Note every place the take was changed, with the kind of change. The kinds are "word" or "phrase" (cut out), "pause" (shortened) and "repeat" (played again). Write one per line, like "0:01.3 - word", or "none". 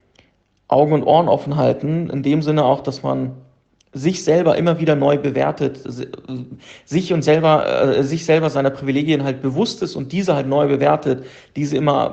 none